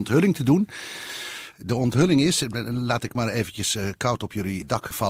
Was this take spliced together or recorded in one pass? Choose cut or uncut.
cut